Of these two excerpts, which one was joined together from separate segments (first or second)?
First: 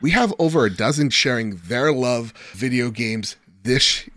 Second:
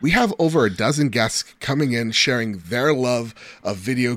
first